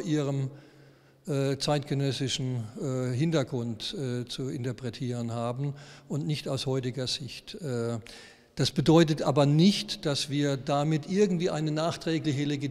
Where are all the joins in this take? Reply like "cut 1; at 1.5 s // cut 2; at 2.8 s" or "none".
none